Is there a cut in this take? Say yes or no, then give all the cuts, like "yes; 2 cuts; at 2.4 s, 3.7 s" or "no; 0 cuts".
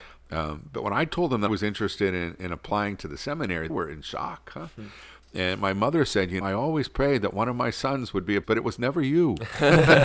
yes; 4 cuts; at 1.5 s, 3.7 s, 6.4 s, 8.4 s